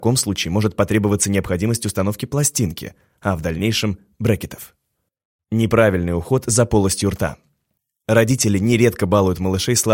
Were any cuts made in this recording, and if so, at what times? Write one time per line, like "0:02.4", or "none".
none

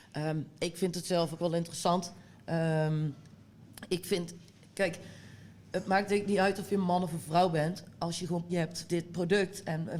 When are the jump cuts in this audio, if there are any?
0:01.4
0:08.5
0:08.9

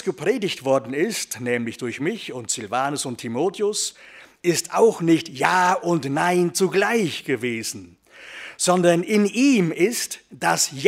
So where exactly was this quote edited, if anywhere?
none

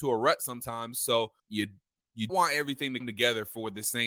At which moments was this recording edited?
0:01.4
0:02.3
0:03.0

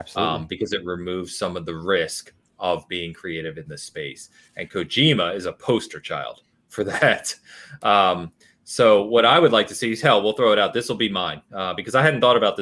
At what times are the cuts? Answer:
none

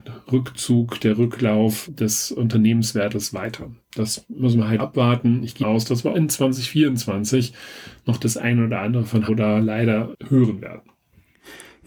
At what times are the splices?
0:01.9
0:04.8
0:05.6
0:06.1
0:09.3
0:10.1

